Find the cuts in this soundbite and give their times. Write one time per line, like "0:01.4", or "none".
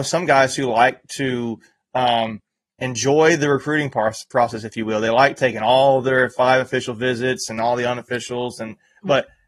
none